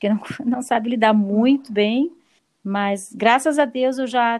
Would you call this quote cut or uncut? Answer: cut